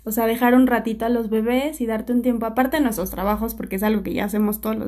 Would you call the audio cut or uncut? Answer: uncut